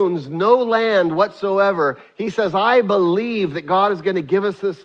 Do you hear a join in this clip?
no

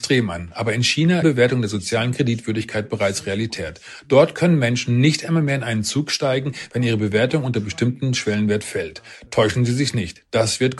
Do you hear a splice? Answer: yes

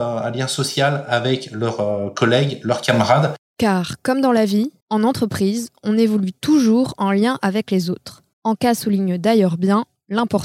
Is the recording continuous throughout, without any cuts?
no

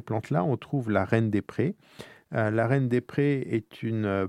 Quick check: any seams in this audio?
no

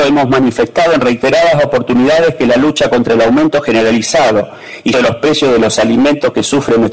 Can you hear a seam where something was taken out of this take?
yes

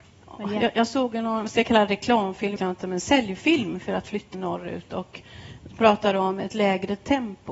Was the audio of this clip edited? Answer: yes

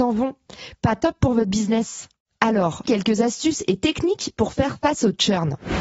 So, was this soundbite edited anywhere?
yes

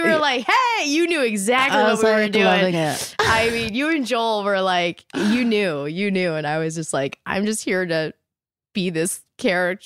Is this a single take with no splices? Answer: yes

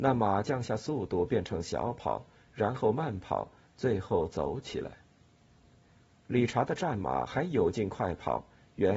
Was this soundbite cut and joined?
no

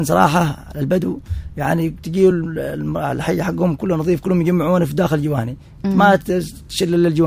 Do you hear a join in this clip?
no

